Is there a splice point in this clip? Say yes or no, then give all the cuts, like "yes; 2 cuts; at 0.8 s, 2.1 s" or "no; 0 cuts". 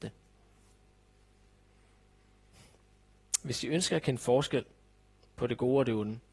no; 0 cuts